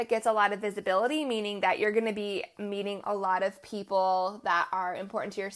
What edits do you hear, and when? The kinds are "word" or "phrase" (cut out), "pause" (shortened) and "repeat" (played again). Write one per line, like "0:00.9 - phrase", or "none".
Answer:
none